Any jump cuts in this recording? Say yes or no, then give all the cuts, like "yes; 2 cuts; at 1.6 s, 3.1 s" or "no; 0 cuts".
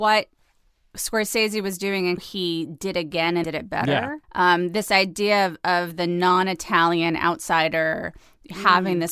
yes; 3 cuts; at 2.2 s, 3.4 s, 4.2 s